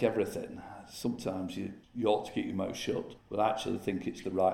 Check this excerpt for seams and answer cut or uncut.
cut